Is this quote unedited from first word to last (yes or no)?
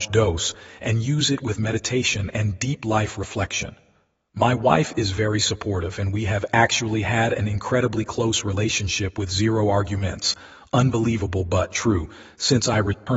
yes